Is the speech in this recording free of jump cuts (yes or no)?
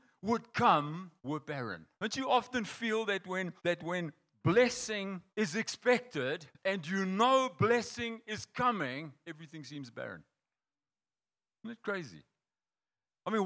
no